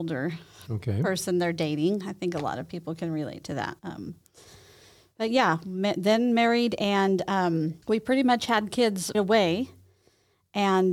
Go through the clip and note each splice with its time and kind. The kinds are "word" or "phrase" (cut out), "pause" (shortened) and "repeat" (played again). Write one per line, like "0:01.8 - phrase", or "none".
0:03.8 - word
0:07.8 - pause
0:09.1 - word